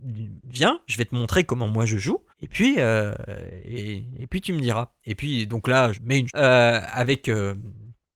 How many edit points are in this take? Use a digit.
3